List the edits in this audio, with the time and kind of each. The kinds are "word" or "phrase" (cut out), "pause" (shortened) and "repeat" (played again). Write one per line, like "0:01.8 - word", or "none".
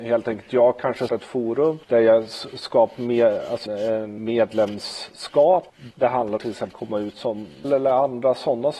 0:01.1 - word
0:02.9 - word
0:03.7 - word
0:05.9 - word
0:06.4 - word
0:06.7 - word
0:07.6 - word